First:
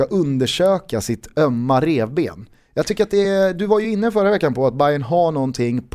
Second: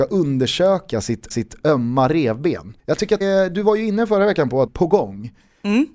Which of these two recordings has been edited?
second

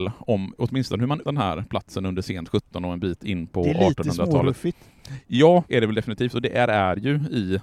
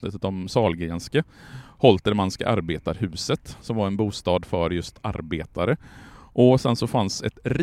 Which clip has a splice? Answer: first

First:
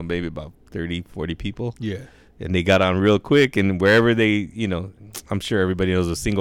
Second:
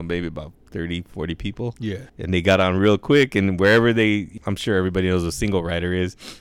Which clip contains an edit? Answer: second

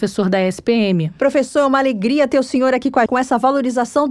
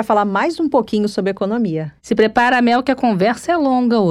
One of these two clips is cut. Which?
first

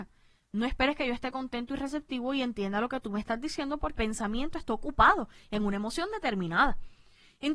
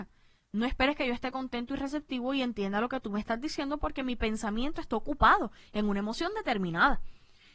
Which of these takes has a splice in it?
first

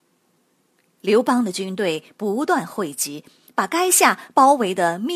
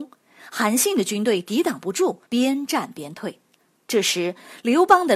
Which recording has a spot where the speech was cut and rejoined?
second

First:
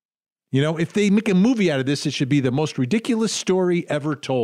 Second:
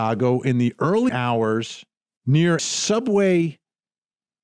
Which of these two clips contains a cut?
second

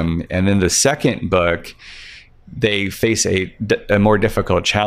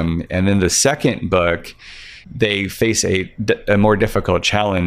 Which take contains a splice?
second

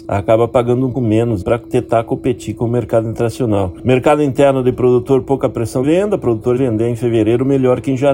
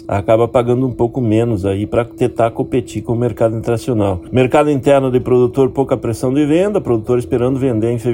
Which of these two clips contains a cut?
first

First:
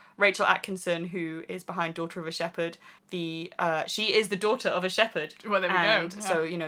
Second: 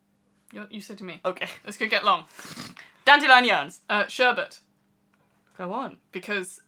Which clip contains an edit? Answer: first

